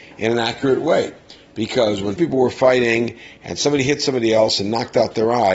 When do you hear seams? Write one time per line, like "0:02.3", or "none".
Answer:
0:02.2